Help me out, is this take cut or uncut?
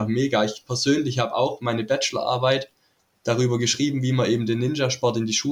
uncut